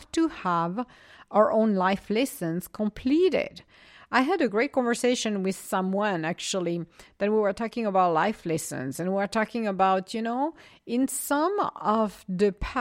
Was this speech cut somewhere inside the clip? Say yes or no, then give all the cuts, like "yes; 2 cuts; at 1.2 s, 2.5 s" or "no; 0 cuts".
no; 0 cuts